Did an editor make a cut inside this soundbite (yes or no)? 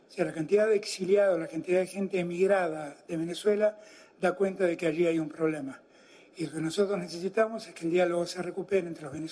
no